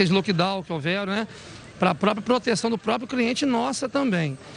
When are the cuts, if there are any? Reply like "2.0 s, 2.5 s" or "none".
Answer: none